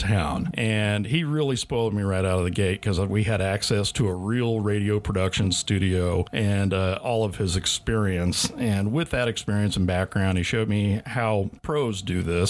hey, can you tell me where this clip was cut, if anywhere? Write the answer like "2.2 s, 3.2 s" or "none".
none